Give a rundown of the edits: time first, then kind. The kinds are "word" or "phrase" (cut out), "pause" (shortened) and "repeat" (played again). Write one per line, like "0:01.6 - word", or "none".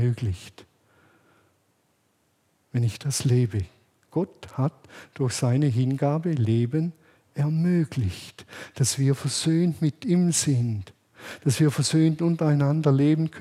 none